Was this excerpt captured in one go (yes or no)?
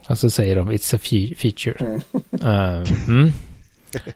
yes